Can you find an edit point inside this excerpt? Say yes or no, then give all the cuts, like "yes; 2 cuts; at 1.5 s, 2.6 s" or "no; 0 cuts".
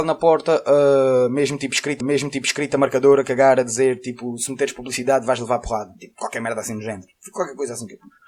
yes; 1 cut; at 2.0 s